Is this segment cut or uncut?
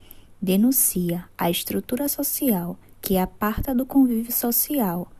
cut